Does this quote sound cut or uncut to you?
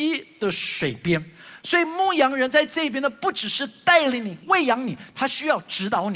cut